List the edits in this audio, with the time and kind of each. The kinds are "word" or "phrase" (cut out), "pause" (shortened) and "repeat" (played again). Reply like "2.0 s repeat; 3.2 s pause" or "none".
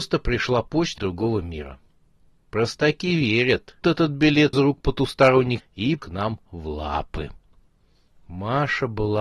1.0 s word; 3.8 s word; 4.5 s word; 5.6 s word; 6.0 s word